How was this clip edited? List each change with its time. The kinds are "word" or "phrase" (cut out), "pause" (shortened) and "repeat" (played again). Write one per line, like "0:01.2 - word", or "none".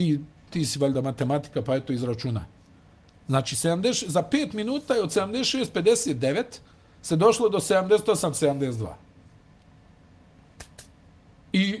none